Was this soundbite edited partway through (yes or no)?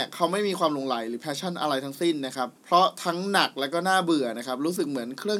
yes